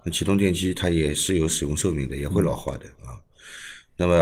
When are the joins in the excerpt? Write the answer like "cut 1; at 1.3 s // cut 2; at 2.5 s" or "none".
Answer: cut 1; at 3.0 s